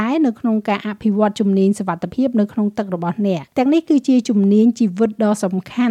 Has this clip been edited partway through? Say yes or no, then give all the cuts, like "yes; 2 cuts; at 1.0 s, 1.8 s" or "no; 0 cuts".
yes; 1 cut; at 3.5 s